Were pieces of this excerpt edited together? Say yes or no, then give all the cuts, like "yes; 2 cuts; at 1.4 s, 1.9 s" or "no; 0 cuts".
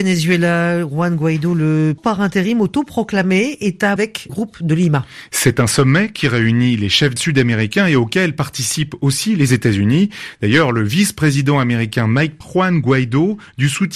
yes; 5 cuts; at 2.0 s, 4.0 s, 4.3 s, 7.2 s, 12.4 s